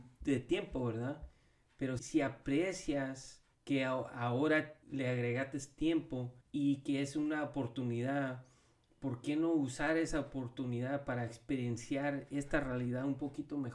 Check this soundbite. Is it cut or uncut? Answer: cut